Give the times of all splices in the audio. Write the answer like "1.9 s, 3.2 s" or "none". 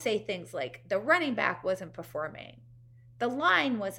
none